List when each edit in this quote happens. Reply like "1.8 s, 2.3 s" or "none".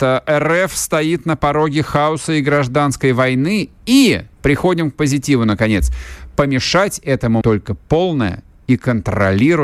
4.3 s, 7.4 s

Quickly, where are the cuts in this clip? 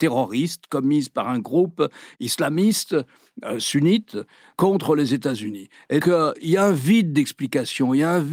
6.0 s

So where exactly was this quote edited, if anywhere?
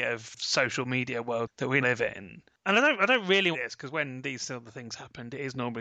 1.8 s, 3.5 s

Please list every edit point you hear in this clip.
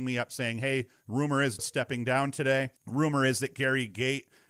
1.6 s, 2.8 s

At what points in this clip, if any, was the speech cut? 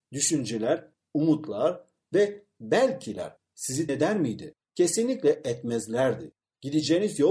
3.9 s

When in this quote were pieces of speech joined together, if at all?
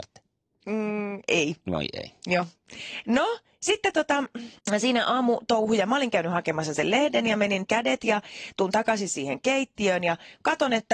4.6 s, 7.7 s

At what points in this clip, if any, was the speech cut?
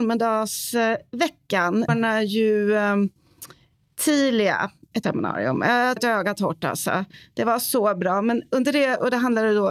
1.9 s, 5.0 s, 6.0 s

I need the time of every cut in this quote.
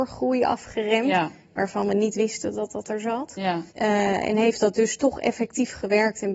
3.7 s

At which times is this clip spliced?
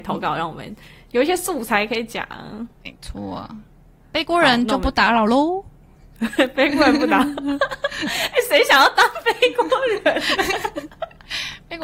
2.7 s

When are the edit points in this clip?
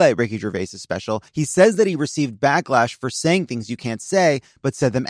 1.3 s

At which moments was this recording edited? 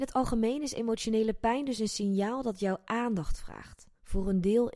none

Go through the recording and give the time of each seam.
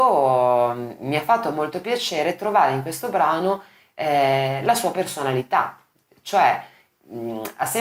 none

